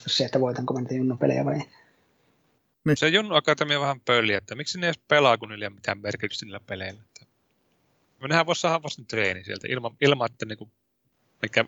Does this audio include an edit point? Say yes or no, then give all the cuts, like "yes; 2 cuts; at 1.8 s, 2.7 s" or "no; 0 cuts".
no; 0 cuts